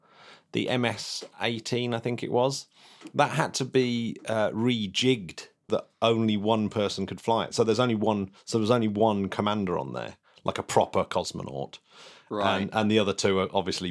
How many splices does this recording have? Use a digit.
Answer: 1